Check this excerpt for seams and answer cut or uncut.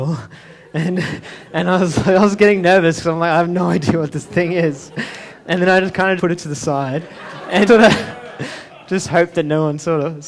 cut